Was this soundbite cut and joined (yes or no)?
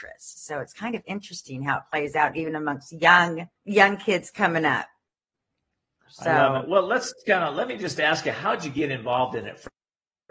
yes